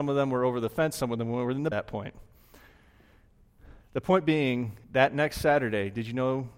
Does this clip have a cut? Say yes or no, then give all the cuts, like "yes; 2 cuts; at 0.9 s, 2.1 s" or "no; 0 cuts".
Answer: yes; 2 cuts; at 1.7 s, 4.8 s